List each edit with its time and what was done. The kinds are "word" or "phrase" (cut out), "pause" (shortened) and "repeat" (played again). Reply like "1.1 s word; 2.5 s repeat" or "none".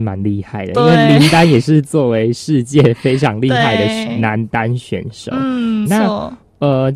5.9 s word

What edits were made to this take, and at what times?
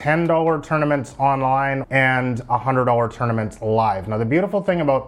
1.8 s phrase

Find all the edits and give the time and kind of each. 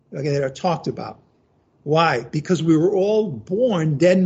none

